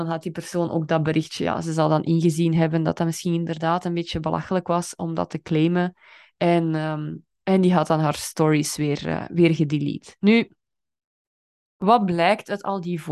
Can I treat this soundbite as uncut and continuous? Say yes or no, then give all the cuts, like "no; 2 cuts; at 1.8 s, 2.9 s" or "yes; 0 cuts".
yes; 0 cuts